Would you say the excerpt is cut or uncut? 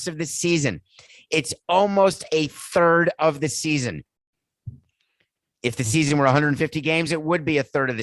uncut